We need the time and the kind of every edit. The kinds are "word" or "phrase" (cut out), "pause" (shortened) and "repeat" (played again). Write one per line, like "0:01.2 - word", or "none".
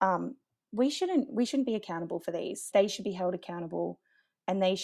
0:02.7 - word